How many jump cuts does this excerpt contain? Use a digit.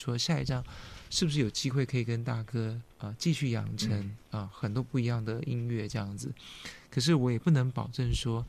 1